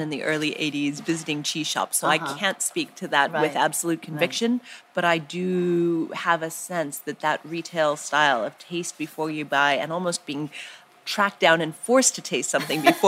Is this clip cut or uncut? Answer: uncut